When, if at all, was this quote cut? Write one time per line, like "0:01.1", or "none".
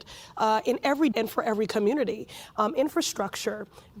0:01.1